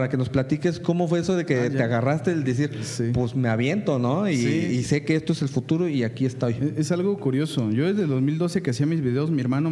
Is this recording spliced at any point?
no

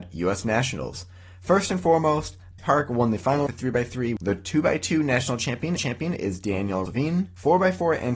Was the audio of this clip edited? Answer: yes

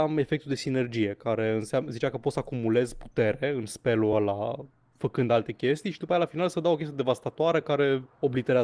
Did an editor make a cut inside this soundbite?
no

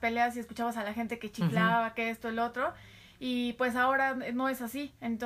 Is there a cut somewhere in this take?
no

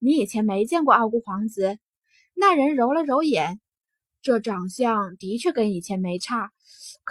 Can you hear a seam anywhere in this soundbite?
no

